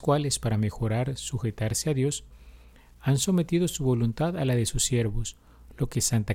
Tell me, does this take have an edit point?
no; 0 cuts

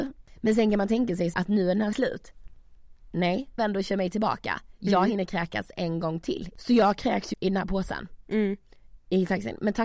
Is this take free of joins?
no; 4 cuts; at 1.3 s, 1.9 s, 3.6 s, 7.3 s

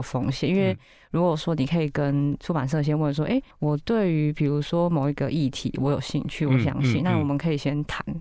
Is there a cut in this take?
yes; 1 cut; at 3.5 s

